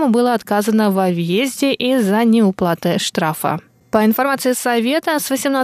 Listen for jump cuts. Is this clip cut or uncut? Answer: uncut